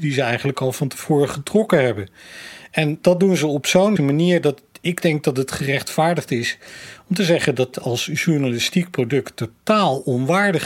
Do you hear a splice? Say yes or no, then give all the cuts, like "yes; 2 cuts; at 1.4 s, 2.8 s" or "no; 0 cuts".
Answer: yes; 2 cuts; at 4.0 s, 7.7 s